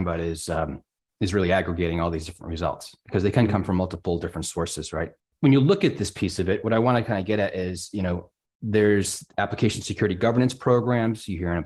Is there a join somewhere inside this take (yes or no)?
no